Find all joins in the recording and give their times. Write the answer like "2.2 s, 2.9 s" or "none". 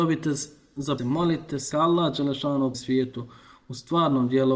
1.0 s, 1.7 s, 2.7 s

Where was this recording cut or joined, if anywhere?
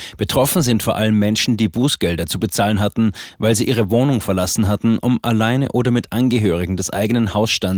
none

